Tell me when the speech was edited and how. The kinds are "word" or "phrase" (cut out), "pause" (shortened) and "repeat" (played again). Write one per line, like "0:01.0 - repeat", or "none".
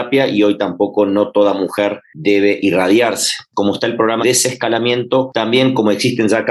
0:04.2 - word

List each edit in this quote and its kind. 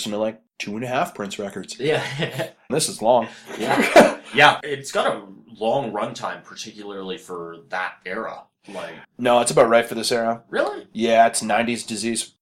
0:02.7 - word
0:09.0 - pause

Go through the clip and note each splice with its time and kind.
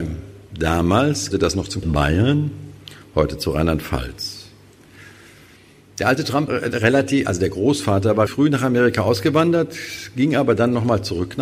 0:01.3 - word
0:01.8 - word
0:06.5 - word
0:08.3 - word

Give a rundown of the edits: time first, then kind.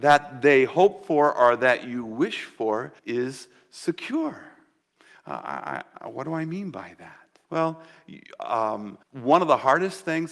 0:03.0 - pause
0:04.8 - pause
0:07.4 - pause
0:09.0 - pause

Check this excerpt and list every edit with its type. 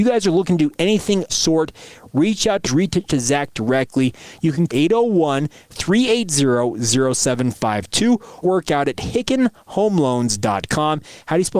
0:01.3 - phrase
0:02.6 - phrase
0:03.1 - word
0:04.7 - phrase
0:08.4 - phrase

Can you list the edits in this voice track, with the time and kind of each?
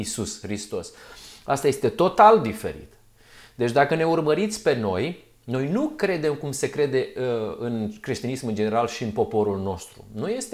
none

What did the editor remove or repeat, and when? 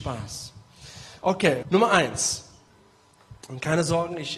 0:01.6 - word

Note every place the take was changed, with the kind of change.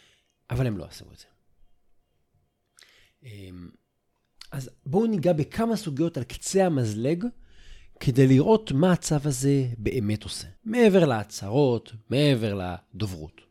0:10.6 - pause

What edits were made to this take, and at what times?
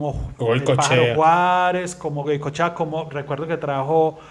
none

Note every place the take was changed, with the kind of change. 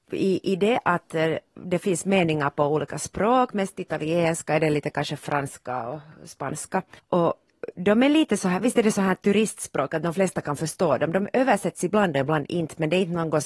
0:07.0 - pause

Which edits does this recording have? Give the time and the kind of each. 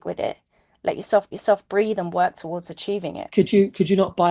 0:01.3 - repeat

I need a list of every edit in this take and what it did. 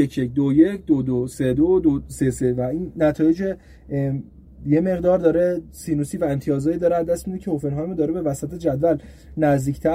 none

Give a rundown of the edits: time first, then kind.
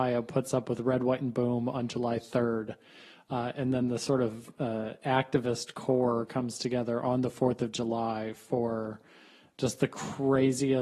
none

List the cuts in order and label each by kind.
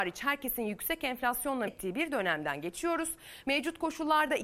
0:01.7 - word

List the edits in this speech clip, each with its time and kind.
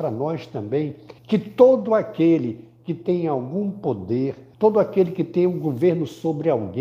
0:01.2 - pause
0:04.5 - pause

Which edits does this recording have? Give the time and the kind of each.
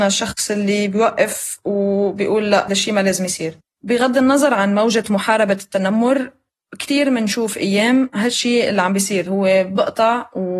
0:02.7 - word
0:09.3 - word

